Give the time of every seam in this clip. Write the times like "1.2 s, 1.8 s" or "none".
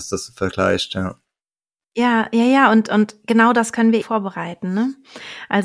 4.0 s

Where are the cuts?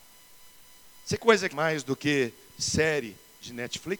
1.2 s, 1.5 s

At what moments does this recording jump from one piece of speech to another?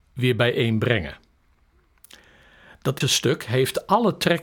3.0 s

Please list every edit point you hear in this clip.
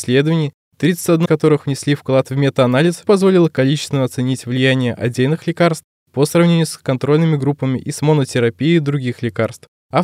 1.2 s, 3.0 s

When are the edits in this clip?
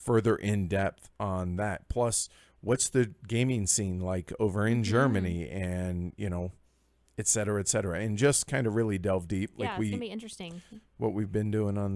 none

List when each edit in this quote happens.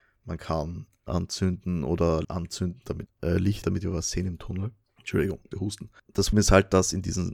1.1 s, 2.2 s, 3.1 s, 3.6 s, 5.5 s, 6.3 s

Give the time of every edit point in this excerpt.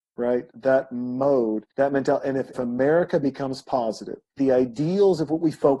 1.7 s, 2.5 s, 4.4 s

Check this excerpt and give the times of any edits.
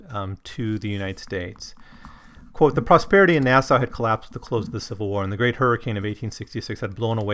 none

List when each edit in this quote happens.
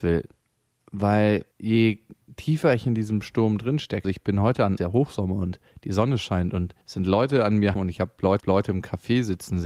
1.5 s, 4.0 s, 4.8 s, 5.7 s, 6.8 s, 7.7 s, 8.4 s

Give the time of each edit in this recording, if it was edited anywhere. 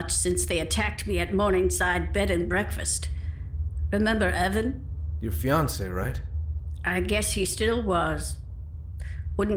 none

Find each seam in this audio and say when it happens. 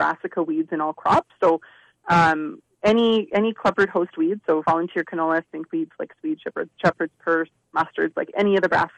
none

